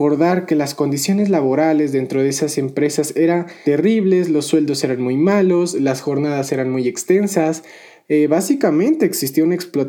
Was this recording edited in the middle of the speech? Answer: yes; 1 cut; at 3.6 s

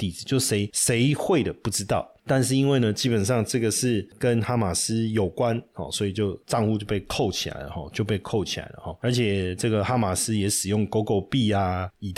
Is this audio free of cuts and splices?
no; 1 cut; at 6.4 s

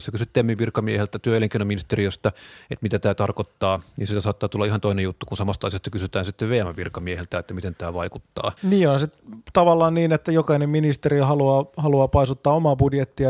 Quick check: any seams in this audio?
yes; 1 cut; at 8.6 s

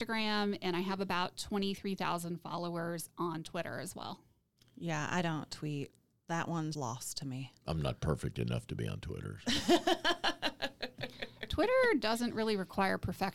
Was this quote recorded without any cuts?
no; 2 cuts; at 4.6 s, 6.7 s

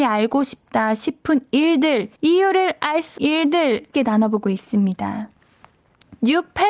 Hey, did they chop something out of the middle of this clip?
yes; 3 cuts; at 2.1 s, 3.2 s, 3.9 s

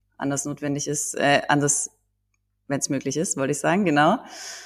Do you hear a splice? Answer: no; 0 cuts

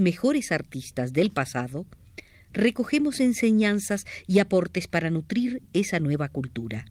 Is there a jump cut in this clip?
no; 0 cuts

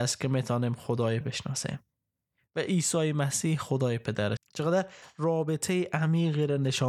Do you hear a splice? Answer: yes; 2 cuts; at 1.2 s, 4.4 s

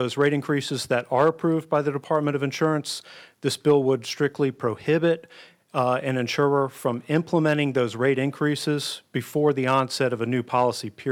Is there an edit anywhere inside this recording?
no; 0 cuts

